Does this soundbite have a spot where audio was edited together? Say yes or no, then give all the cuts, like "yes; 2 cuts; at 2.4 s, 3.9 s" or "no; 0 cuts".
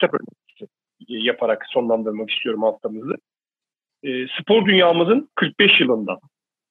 no; 0 cuts